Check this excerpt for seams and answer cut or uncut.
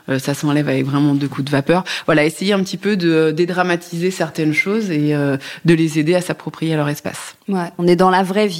uncut